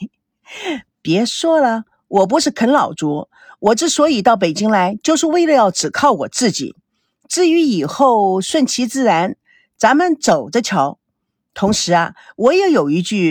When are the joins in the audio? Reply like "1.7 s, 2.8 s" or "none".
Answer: none